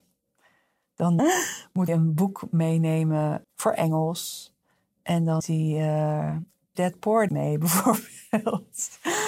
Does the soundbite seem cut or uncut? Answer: cut